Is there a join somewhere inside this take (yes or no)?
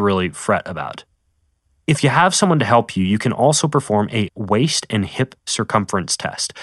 no